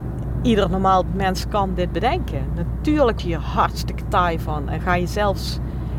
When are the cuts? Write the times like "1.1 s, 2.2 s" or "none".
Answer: 1.1 s, 3.2 s